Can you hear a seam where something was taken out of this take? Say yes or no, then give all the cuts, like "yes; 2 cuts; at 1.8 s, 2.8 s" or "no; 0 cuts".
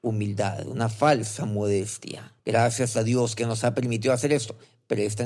yes; 1 cut; at 2.4 s